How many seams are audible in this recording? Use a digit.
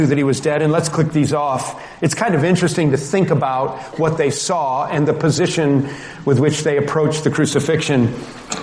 0